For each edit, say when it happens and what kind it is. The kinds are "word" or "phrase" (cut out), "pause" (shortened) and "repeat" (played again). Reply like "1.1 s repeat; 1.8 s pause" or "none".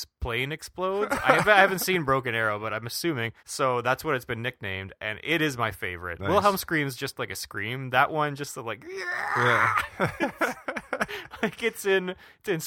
3.4 s pause